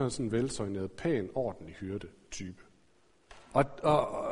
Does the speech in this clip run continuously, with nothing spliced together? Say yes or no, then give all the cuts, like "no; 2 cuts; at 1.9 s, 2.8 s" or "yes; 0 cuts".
yes; 0 cuts